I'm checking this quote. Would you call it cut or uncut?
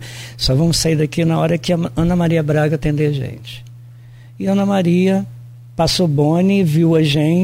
uncut